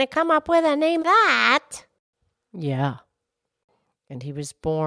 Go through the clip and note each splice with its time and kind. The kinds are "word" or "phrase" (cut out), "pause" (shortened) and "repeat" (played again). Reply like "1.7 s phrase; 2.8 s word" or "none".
1.0 s word